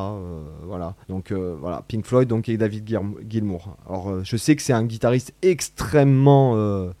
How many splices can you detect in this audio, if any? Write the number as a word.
one